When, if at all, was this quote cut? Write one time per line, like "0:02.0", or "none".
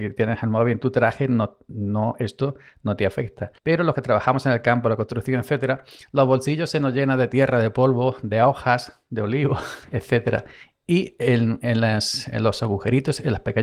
0:03.6